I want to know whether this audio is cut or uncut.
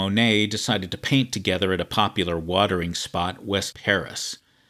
cut